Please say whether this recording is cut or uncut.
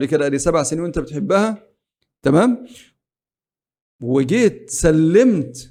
uncut